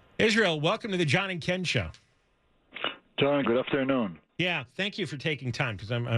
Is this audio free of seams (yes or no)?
no